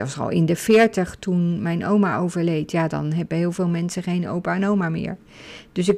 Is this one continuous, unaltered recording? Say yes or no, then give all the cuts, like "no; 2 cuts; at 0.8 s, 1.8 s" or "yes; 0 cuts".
yes; 0 cuts